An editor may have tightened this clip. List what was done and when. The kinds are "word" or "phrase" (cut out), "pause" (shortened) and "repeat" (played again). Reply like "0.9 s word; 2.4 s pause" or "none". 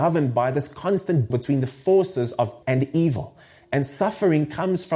1.3 s word; 2.6 s word